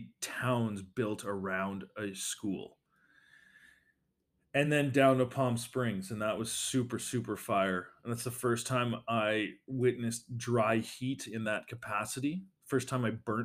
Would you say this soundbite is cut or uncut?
uncut